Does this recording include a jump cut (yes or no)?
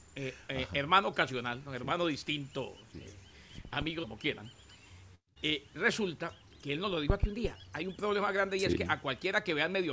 yes